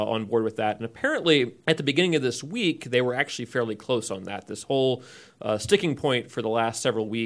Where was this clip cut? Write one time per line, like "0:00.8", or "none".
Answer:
0:01.6